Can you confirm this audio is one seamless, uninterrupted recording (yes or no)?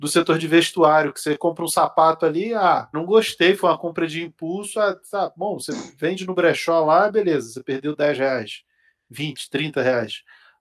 yes